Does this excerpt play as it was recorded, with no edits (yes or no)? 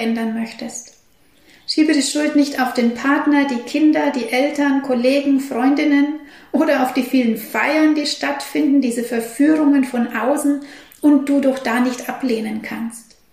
yes